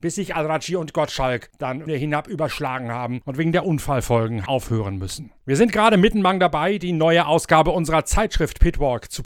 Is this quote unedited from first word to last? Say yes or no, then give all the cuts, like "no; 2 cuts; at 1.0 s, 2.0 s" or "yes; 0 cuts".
no; 2 cuts; at 1.9 s, 4.5 s